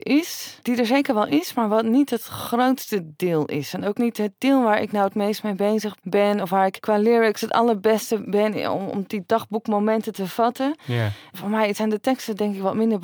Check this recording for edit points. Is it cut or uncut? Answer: uncut